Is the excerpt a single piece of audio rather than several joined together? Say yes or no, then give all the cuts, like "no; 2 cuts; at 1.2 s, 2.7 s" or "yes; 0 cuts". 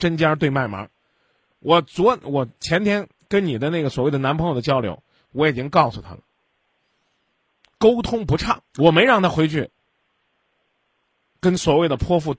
no; 1 cut; at 8.7 s